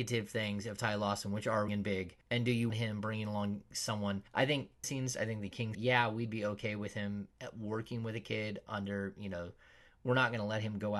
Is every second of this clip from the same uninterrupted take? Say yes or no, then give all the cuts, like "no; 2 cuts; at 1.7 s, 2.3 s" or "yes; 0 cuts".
no; 6 cuts; at 1.7 s, 2.2 s, 2.7 s, 4.3 s, 4.8 s, 5.7 s